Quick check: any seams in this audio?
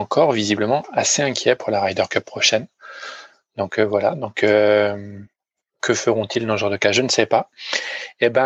no; 0 cuts

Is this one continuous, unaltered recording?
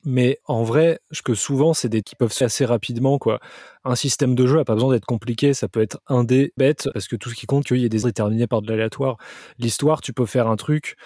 no; 6 cuts; at 1.2 s, 2.0 s, 2.4 s, 6.6 s, 7.6 s, 8.0 s

